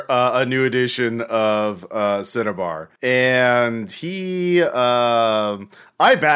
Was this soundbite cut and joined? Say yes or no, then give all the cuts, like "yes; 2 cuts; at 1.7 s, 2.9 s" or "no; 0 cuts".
yes; 1 cut; at 3.0 s